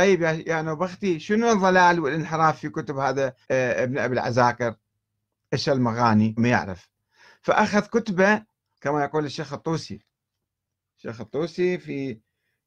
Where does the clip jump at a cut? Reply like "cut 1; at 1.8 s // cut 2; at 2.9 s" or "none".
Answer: cut 1; at 3.4 s // cut 2; at 6.4 s // cut 3; at 8.7 s